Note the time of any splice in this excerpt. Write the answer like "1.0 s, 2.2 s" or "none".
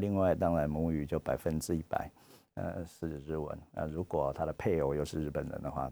none